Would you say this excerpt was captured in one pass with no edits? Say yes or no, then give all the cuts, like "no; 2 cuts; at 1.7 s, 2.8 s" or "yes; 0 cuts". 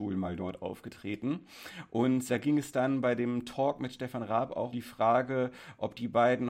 no; 2 cuts; at 2.3 s, 4.7 s